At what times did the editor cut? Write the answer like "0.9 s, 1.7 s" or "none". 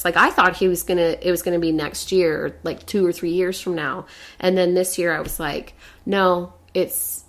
none